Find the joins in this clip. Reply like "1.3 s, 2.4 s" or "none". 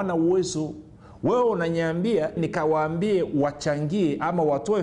2.4 s